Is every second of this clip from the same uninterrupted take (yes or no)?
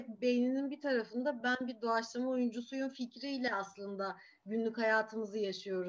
yes